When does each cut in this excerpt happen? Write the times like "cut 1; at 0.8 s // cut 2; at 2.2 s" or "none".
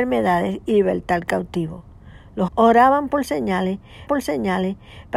cut 1; at 2.5 s // cut 2; at 4.1 s